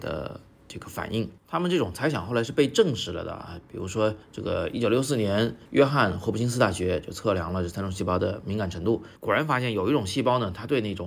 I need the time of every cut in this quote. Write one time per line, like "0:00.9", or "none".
0:01.4
0:04.2
0:05.6
0:09.2